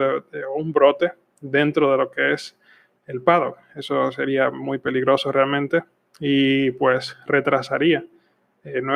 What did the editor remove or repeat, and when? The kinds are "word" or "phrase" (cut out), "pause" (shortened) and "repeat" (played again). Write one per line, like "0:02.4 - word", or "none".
none